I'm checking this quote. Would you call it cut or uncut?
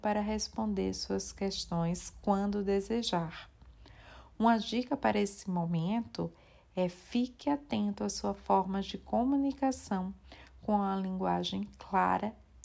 uncut